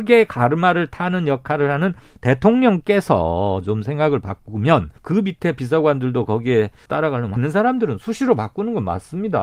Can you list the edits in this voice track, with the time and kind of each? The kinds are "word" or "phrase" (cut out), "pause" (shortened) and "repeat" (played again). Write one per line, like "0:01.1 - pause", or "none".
0:05.0 - pause
0:06.9 - word
0:07.4 - phrase